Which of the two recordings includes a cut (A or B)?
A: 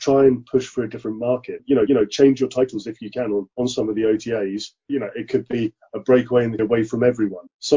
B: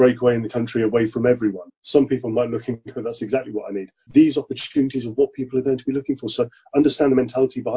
A